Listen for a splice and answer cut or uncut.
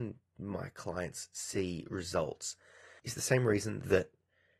uncut